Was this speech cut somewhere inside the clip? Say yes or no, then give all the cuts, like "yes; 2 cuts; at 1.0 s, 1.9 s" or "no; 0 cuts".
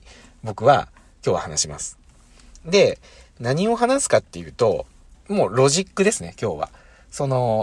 no; 0 cuts